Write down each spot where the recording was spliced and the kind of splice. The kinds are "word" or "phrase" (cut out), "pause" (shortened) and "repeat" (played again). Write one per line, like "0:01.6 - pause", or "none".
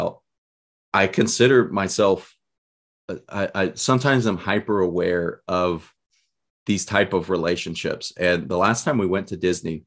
none